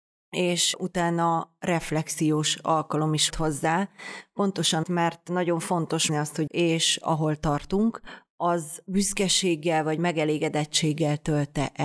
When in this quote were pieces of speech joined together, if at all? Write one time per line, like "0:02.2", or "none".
0:03.3
0:04.8
0:06.1
0:06.5